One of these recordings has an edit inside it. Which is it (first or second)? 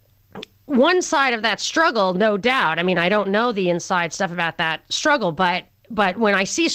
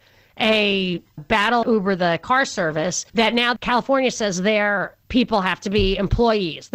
second